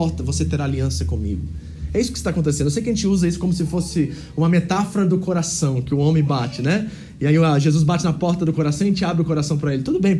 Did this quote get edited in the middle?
no; 0 cuts

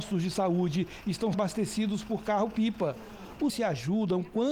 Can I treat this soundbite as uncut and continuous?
no; 2 cuts; at 1.3 s, 3.5 s

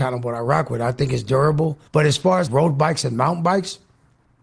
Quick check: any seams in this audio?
yes; 2 cuts; at 1.9 s, 2.5 s

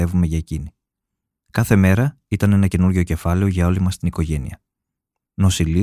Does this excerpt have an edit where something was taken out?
no; 0 cuts

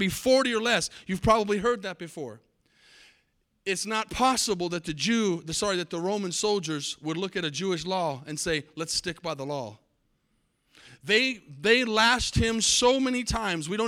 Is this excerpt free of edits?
yes; 0 cuts

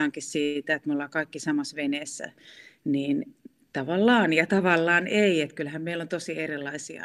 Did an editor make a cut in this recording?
no; 0 cuts

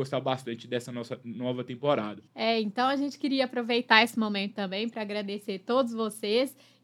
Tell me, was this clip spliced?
yes; 1 cut; at 2.3 s

